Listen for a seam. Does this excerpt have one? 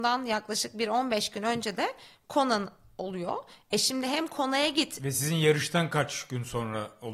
no; 0 cuts

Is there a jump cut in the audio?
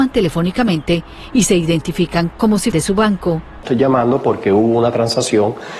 yes; 1 cut; at 2.7 s

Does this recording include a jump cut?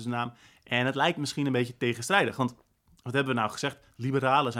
no; 0 cuts

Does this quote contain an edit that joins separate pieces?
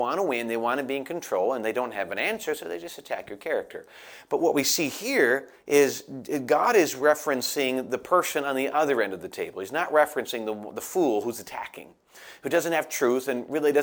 no; 0 cuts

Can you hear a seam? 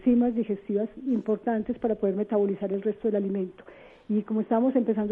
no; 0 cuts

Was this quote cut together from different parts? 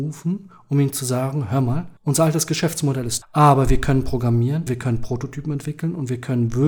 yes; 3 cuts; at 2.0 s, 3.2 s, 4.7 s

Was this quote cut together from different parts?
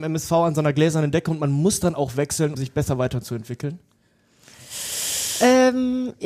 yes; 1 cut; at 2.5 s

